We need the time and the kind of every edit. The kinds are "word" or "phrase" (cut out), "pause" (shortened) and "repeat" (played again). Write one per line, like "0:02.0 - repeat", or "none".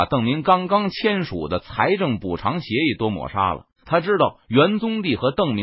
0:03.7 - pause